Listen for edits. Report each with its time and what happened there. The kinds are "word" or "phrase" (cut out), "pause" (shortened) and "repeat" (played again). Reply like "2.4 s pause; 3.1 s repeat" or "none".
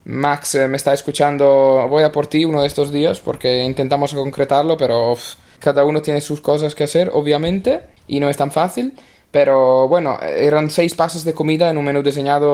none